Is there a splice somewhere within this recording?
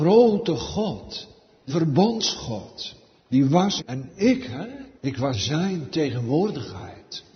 yes; 4 cuts; at 1.7 s, 3.8 s, 4.9 s, 5.3 s

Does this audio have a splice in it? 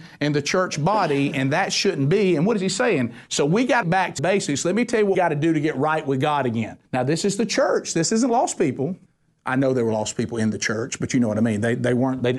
yes; 5 cuts; at 3.8 s, 4.2 s, 5.1 s, 6.8 s, 9.1 s

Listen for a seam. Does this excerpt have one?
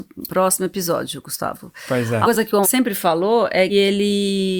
yes; 3 cuts; at 2.2 s, 2.6 s, 3.7 s

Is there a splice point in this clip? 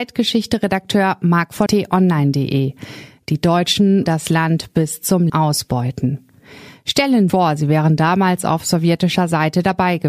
yes; 4 cuts; at 1.7 s, 4.1 s, 5.3 s, 7.3 s

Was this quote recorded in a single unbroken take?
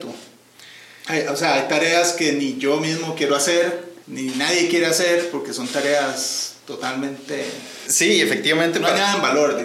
no; 1 cut; at 4.0 s

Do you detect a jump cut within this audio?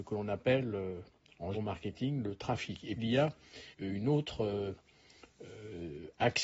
yes; 3 cuts; at 1.5 s, 3.0 s, 3.7 s

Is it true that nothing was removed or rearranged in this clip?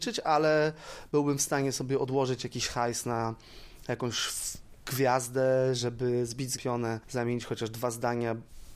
no; 1 cut; at 6.6 s

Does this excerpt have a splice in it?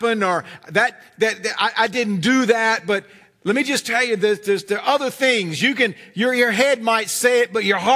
no; 0 cuts

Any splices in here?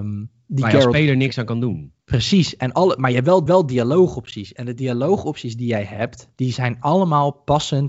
yes; 2 cuts; at 2.0 s, 3.5 s

